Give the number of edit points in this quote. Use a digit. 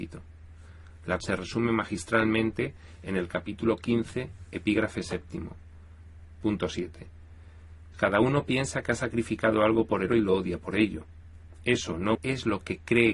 4